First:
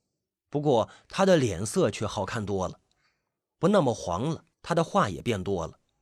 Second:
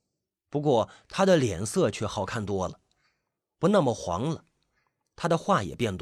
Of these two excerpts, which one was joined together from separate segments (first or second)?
first